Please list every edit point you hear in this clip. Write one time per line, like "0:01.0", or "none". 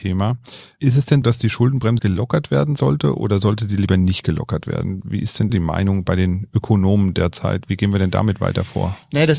0:01.2
0:02.0
0:05.5